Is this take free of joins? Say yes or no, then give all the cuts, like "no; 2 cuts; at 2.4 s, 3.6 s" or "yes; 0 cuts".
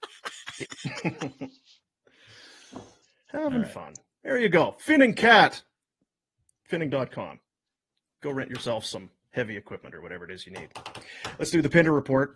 yes; 0 cuts